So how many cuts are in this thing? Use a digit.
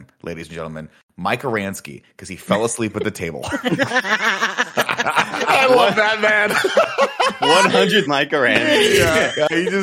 1